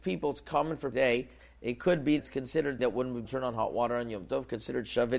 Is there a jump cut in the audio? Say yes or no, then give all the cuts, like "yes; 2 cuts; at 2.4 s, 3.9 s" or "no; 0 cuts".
yes; 5 cuts; at 0.9 s, 1.4 s, 2.2 s, 2.8 s, 3.2 s